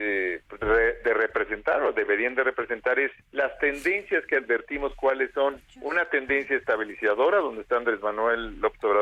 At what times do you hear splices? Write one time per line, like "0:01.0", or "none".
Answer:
0:03.2